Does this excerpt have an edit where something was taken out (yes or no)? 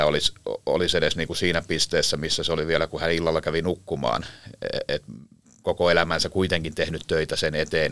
no